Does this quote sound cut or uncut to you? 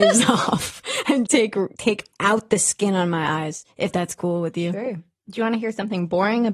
cut